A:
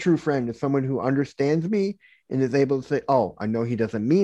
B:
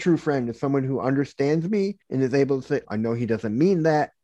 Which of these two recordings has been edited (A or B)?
B